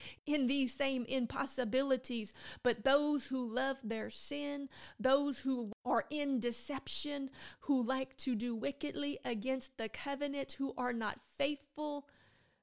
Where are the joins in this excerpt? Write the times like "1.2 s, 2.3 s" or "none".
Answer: 7.6 s